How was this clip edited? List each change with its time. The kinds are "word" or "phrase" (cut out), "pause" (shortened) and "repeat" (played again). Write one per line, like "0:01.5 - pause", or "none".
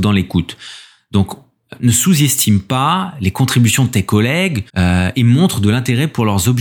0:04.7 - pause